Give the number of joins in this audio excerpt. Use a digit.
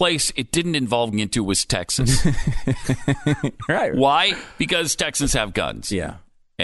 1